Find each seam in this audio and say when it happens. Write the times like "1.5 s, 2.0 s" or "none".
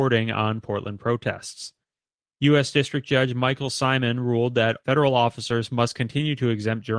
none